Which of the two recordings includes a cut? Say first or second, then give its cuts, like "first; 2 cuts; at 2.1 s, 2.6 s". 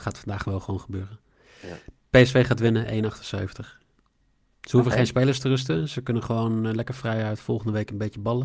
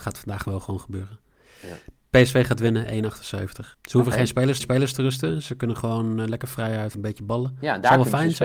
second; 3 cuts; at 3.7 s, 4.6 s, 6.9 s